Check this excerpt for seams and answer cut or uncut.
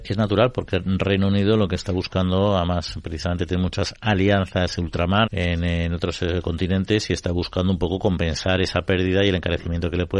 cut